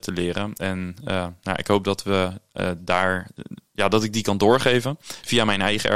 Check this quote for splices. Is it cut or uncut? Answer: uncut